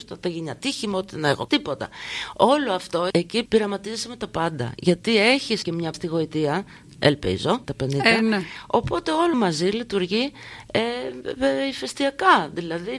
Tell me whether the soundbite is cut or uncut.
cut